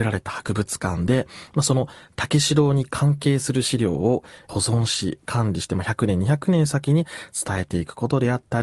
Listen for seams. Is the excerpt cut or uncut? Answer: uncut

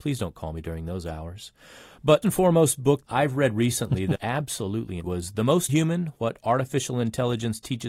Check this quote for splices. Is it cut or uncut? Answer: cut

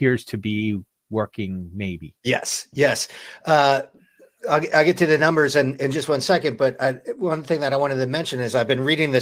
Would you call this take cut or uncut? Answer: uncut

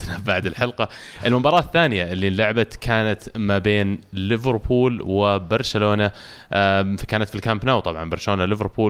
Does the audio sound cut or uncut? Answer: uncut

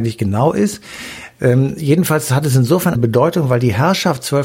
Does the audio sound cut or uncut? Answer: cut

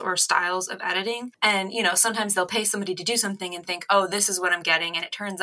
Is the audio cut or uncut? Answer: uncut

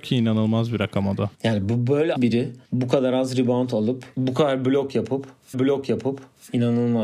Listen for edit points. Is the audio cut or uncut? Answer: cut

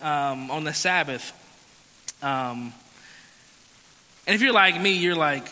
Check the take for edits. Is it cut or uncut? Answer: uncut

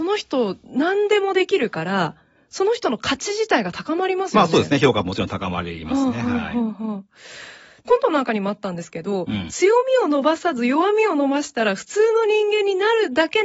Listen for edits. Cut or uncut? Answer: uncut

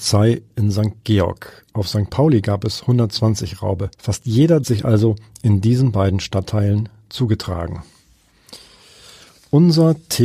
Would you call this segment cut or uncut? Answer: cut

